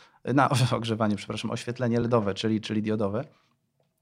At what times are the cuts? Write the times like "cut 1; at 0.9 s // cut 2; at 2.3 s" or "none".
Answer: none